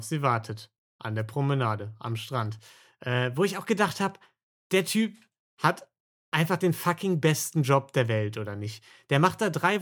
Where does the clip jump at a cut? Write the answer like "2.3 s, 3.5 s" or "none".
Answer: none